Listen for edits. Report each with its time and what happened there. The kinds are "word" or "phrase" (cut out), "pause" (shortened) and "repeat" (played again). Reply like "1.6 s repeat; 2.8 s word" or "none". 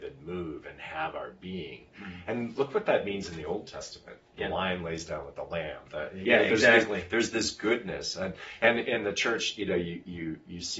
none